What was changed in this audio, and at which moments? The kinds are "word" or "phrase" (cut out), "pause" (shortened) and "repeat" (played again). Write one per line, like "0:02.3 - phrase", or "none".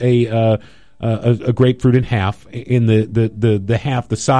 none